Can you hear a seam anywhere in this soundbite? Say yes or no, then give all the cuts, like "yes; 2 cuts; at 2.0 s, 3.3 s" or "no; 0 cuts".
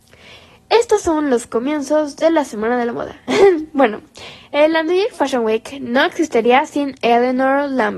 no; 0 cuts